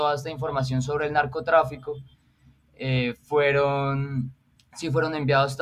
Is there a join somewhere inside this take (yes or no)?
no